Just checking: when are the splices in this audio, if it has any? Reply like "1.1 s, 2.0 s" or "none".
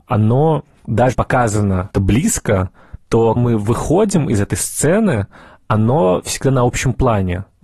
1.1 s, 1.9 s, 3.4 s